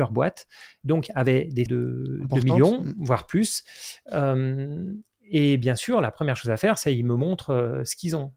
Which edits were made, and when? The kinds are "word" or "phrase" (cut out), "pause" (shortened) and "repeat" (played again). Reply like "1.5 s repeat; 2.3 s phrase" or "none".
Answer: 1.7 s phrase